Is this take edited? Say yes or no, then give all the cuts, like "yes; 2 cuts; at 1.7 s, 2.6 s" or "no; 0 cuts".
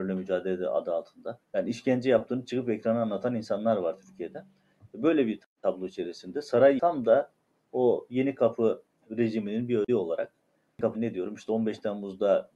yes; 4 cuts; at 1.4 s, 6.8 s, 9.9 s, 10.9 s